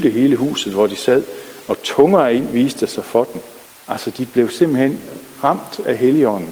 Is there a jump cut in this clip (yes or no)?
yes